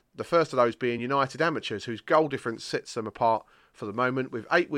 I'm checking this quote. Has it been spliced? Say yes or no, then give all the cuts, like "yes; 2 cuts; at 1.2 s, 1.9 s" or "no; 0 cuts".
no; 0 cuts